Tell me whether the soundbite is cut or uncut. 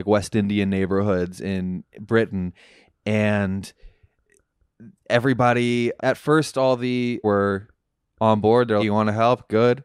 cut